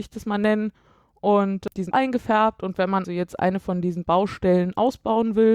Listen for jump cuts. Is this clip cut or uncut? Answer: cut